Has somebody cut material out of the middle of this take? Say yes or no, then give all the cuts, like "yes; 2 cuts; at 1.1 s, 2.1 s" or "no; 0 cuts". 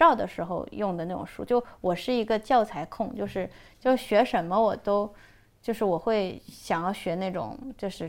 no; 0 cuts